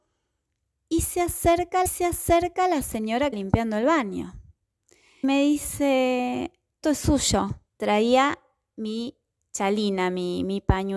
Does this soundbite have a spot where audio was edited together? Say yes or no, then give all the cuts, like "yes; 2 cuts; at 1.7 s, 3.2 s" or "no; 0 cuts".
yes; 5 cuts; at 1.9 s, 3.3 s, 5.2 s, 6.8 s, 7.7 s